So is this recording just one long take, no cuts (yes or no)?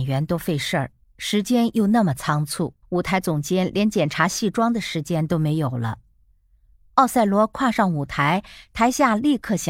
no